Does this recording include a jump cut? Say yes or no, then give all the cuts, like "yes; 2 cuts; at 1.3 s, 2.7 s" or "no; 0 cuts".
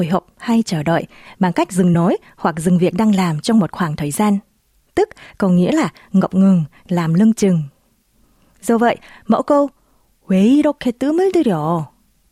no; 0 cuts